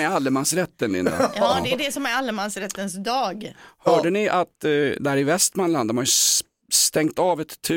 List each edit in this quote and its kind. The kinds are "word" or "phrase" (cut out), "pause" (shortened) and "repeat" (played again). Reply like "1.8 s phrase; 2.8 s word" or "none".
none